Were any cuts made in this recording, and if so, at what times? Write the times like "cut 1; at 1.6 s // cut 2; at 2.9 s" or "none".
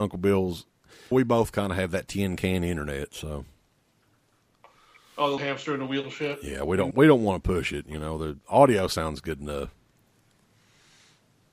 cut 1; at 1.1 s // cut 2; at 5.4 s // cut 3; at 6.9 s